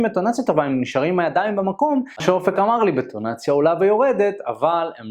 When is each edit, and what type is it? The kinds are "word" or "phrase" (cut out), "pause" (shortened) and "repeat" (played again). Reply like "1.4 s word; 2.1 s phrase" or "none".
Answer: 2.2 s phrase